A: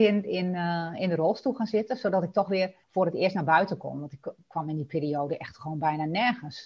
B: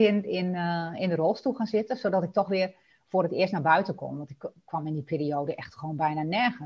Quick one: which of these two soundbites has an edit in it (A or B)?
A